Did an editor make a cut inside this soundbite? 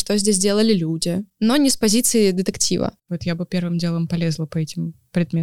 no; 0 cuts

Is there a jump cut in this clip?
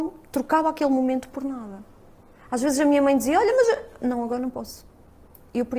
no; 0 cuts

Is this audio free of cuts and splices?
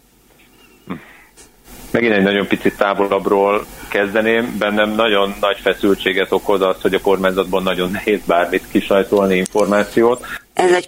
yes; 0 cuts

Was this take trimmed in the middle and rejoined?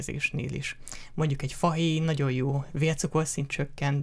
no; 0 cuts

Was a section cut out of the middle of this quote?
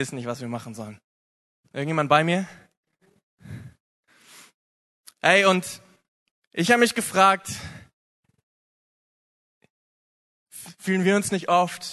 no; 0 cuts

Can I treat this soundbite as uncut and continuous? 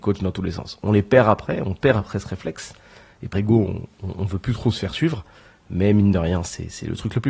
no; 1 cut; at 3.3 s

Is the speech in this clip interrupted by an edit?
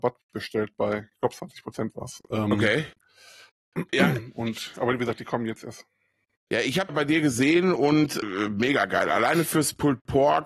yes; 2 cuts; at 6.9 s, 8.2 s

